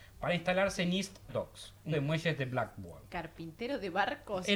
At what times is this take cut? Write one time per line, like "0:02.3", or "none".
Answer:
0:01.3
0:01.9